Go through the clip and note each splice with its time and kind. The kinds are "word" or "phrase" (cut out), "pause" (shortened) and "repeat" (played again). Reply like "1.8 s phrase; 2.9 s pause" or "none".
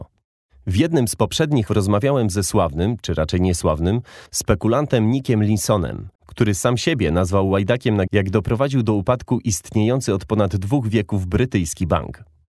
1.7 s word; 4.3 s pause; 6.2 s pause; 8.1 s phrase